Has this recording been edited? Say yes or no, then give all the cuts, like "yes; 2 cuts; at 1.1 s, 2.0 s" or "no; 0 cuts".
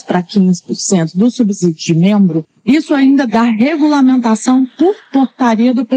yes; 1 cut; at 3.3 s